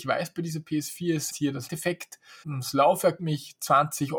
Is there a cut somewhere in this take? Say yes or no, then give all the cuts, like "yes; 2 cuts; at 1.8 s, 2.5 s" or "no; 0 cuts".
yes; 4 cuts; at 1.3 s, 1.7 s, 2.4 s, 3.2 s